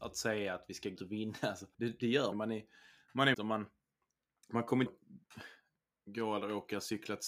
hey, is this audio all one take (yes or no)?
no